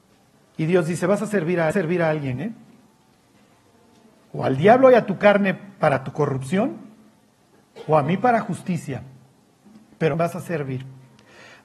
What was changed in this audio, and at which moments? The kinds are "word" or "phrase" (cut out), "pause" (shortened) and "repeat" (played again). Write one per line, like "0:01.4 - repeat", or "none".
0:01.7 - repeat
0:10.1 - phrase